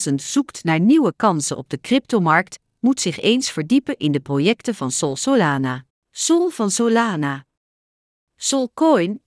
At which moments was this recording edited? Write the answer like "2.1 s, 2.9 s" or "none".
5.9 s